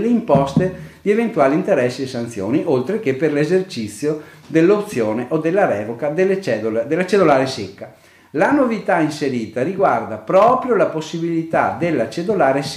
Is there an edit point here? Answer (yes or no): no